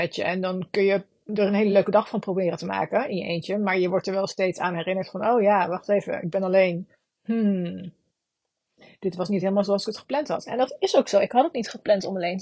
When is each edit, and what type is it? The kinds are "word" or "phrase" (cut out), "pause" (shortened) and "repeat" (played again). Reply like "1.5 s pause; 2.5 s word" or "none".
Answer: none

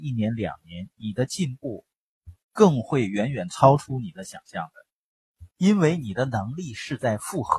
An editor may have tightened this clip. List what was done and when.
2.4 s pause; 5.5 s pause

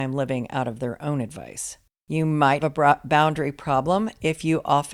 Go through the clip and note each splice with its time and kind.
2.6 s word

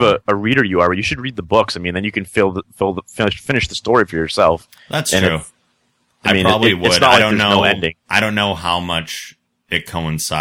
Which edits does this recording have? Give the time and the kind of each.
none

